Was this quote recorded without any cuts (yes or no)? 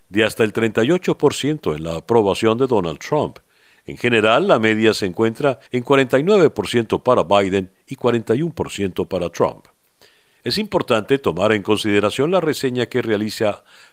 no